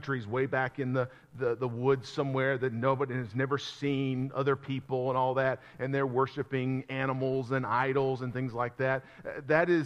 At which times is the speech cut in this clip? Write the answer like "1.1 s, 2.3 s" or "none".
none